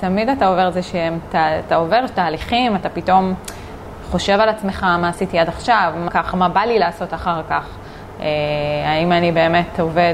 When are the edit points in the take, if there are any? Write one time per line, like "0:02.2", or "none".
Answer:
0:06.1